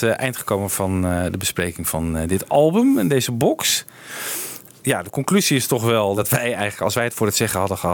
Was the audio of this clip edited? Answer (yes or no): no